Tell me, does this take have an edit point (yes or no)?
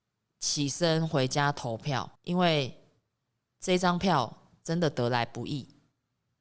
yes